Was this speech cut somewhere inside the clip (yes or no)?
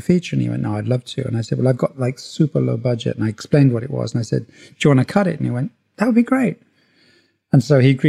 no